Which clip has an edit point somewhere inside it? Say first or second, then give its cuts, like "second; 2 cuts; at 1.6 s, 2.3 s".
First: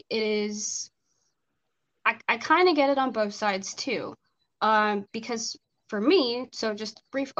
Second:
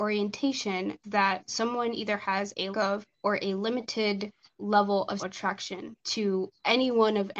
second; 5 cuts; at 1.0 s, 2.7 s, 3.1 s, 4.5 s, 5.2 s